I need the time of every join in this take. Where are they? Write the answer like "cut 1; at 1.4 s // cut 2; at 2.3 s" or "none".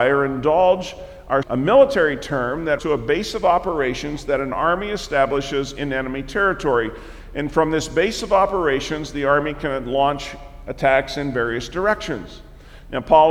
cut 1; at 1.4 s // cut 2; at 2.8 s